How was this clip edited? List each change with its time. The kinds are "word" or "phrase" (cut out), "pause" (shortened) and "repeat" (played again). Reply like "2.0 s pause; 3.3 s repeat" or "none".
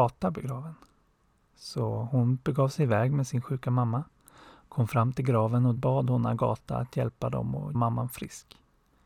5.8 s word; 7.7 s word